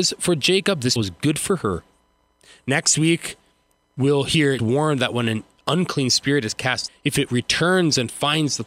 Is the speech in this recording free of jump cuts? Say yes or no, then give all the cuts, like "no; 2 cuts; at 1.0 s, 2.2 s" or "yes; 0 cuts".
no; 3 cuts; at 1.0 s, 4.6 s, 6.9 s